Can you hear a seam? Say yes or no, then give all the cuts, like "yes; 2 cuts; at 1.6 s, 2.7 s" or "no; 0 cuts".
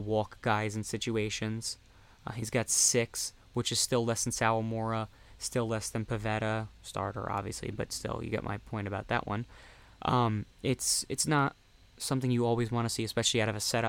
no; 0 cuts